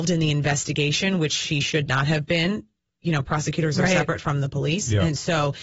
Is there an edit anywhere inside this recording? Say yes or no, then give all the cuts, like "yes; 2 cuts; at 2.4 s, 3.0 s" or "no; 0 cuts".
no; 0 cuts